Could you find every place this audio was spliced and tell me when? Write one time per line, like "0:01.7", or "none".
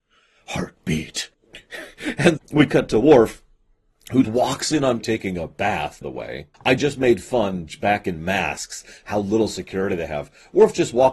0:01.3
0:02.4
0:04.2
0:05.0
0:06.0
0:06.5